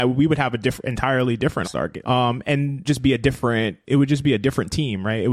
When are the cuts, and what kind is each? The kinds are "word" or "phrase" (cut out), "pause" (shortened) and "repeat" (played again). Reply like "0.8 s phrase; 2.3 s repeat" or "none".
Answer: 1.6 s word; 2.0 s phrase; 2.8 s phrase; 3.8 s pause